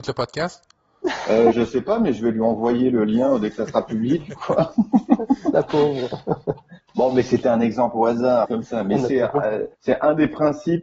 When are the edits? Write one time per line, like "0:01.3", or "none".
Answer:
0:01.5
0:08.4
0:09.7